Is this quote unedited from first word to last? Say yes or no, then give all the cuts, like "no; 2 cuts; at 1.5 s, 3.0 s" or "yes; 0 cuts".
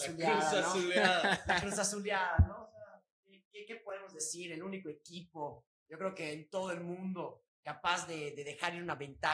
no; 1 cut; at 7.5 s